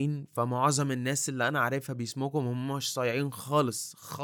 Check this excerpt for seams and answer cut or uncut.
uncut